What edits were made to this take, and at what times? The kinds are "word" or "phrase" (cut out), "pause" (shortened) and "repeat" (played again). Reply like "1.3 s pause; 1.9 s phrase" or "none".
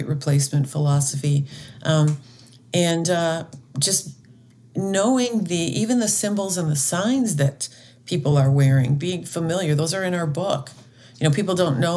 none